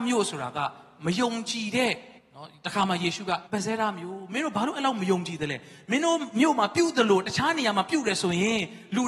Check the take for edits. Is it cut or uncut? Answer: cut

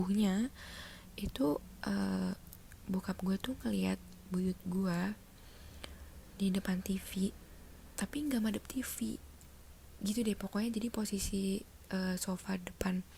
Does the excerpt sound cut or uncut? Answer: uncut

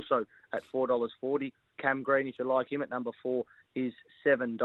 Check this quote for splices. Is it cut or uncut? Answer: uncut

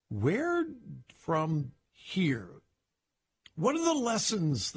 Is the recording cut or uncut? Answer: cut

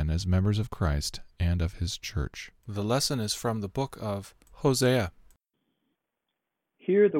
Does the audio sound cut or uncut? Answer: cut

